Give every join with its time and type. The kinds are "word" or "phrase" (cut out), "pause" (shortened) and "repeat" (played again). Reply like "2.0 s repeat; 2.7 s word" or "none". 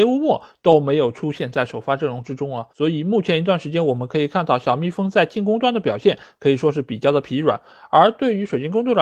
2.7 s pause